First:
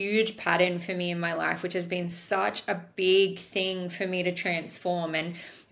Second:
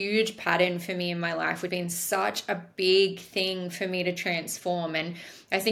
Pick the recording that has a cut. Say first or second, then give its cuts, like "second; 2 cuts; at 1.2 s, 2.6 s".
second; 1 cut; at 1.7 s